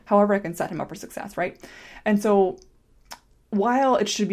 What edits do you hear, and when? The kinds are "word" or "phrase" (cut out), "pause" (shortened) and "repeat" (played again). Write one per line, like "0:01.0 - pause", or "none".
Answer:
none